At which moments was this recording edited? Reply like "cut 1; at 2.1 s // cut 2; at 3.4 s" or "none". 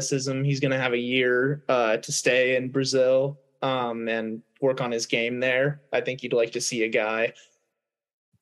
none